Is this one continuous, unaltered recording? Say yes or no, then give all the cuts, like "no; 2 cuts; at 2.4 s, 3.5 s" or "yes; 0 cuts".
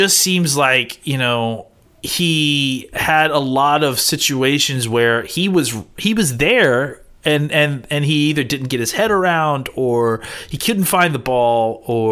no; 1 cut; at 1.8 s